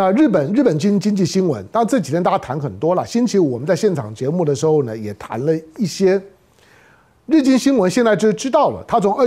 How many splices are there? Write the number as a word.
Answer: zero